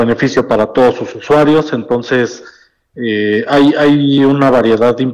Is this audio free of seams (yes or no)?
yes